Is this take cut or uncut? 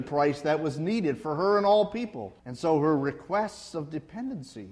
cut